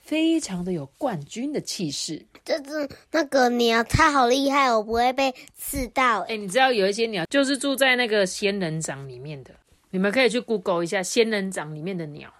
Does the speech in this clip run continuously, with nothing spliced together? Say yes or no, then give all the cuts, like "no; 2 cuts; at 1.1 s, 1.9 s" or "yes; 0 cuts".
yes; 0 cuts